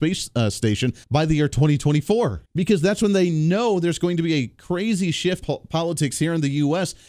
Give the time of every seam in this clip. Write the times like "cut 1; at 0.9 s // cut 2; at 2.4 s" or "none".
cut 1; at 1.0 s // cut 2; at 2.5 s // cut 3; at 5.4 s